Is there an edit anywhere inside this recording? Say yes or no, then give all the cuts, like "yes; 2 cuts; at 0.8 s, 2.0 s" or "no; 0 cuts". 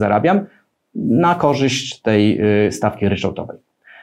no; 0 cuts